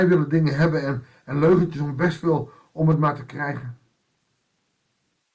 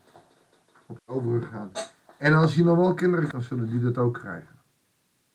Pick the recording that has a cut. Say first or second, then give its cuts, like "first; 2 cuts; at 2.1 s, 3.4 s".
second; 2 cuts; at 1.0 s, 3.3 s